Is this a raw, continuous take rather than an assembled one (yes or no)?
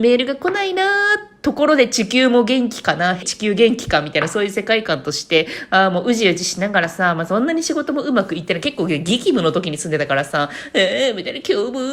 no